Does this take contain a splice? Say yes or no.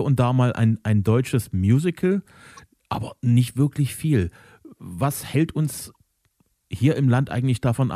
no